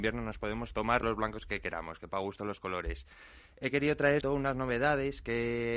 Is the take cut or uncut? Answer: cut